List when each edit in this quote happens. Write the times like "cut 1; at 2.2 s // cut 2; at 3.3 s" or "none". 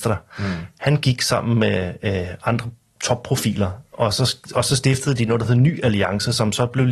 none